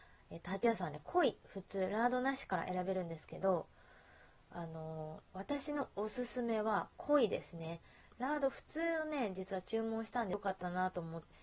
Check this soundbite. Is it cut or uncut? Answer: cut